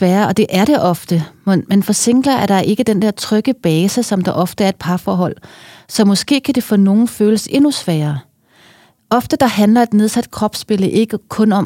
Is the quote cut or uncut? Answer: uncut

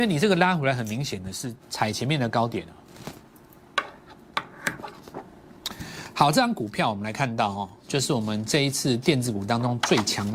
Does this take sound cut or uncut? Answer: cut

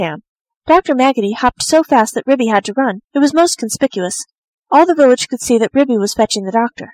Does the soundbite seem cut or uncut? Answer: cut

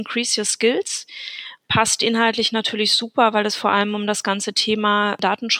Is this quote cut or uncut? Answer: uncut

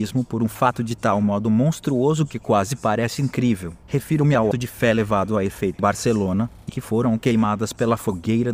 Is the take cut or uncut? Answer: cut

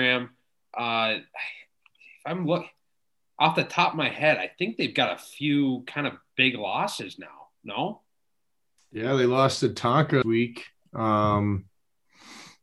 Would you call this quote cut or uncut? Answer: cut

